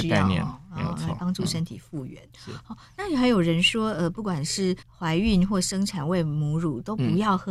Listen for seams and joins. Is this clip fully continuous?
no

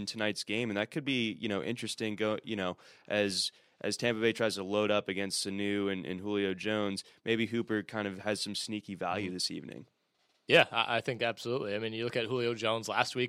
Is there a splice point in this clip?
no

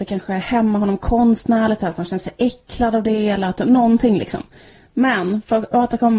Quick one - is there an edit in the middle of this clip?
no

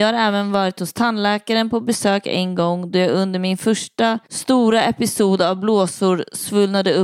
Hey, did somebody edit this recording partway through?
yes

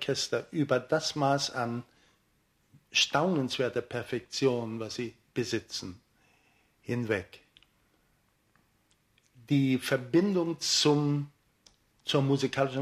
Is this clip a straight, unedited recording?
yes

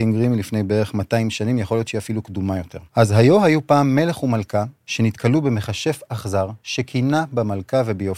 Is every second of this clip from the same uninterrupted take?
no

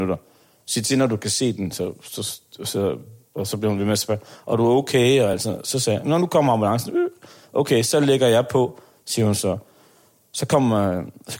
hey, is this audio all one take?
yes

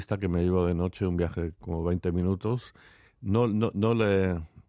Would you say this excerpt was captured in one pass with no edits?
yes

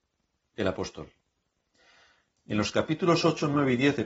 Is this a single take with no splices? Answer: yes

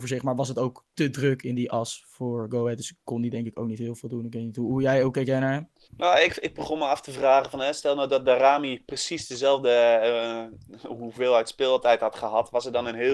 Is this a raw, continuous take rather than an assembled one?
no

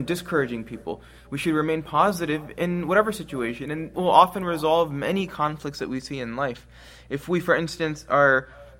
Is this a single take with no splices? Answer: no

